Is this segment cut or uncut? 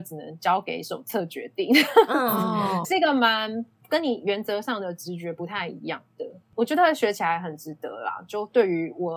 cut